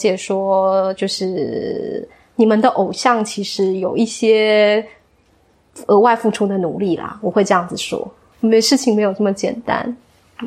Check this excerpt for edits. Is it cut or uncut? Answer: cut